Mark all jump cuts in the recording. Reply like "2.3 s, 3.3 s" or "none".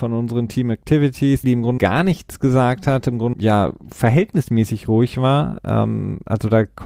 1.4 s, 1.8 s, 3.3 s